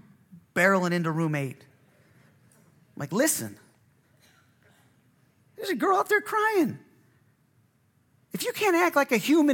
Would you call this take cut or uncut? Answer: uncut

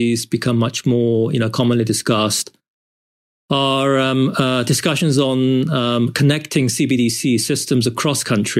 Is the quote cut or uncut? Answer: uncut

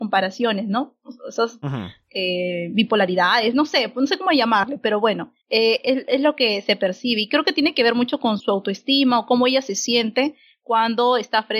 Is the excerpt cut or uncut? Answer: cut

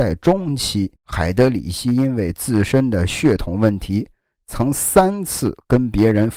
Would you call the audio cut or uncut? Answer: cut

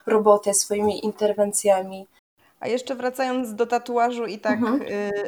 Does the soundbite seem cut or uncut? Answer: cut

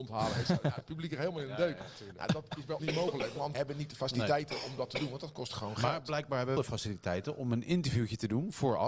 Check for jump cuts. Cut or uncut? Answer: cut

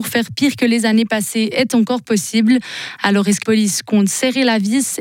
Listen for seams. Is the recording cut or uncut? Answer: cut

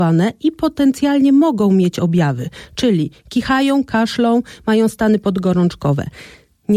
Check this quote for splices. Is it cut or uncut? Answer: uncut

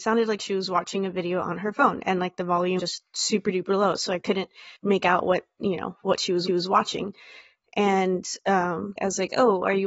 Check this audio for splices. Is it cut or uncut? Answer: cut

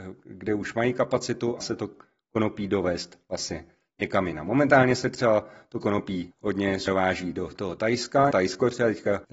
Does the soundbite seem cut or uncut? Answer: cut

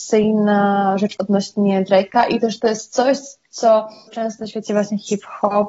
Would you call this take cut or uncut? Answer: cut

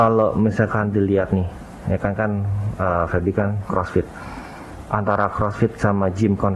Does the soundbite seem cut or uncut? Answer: uncut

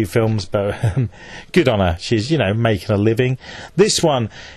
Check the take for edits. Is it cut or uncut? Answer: uncut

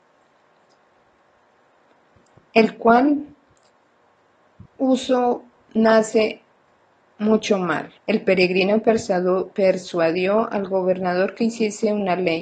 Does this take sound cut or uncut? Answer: cut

